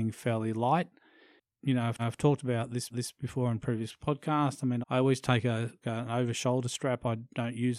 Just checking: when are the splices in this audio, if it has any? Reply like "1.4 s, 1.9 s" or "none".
2.0 s, 2.9 s, 4.8 s, 5.8 s